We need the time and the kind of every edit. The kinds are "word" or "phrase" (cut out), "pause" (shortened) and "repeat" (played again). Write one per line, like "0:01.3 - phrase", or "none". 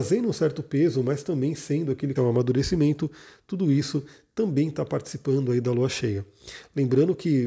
0:02.2 - word